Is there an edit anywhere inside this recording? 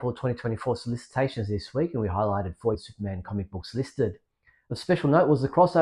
yes; 1 cut; at 2.7 s

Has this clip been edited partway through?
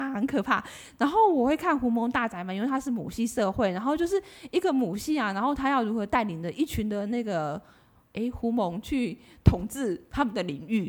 no; 0 cuts

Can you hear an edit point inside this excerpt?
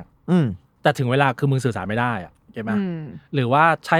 yes; 1 cut; at 2.4 s

